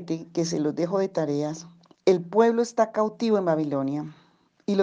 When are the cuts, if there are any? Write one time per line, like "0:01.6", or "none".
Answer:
0:01.9